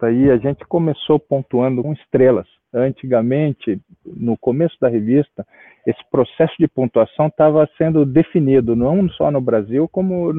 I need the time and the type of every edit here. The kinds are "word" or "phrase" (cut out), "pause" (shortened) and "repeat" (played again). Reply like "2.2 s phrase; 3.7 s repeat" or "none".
1.8 s word